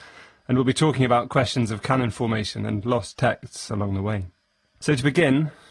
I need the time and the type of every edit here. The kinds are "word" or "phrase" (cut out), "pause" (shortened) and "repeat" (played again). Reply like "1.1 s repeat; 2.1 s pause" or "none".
none